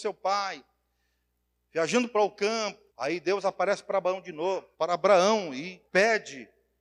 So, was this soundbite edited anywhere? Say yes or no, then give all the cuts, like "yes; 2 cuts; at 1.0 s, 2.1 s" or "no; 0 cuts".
yes; 3 cuts; at 2.9 s, 4.7 s, 5.9 s